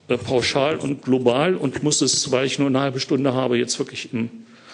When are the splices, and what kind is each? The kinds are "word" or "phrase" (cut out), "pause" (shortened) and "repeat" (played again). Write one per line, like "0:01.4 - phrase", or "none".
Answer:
none